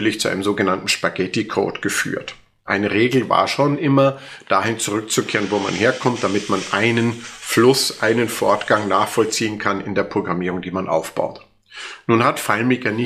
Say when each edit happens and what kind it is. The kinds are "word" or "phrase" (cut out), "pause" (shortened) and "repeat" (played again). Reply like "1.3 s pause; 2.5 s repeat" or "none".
none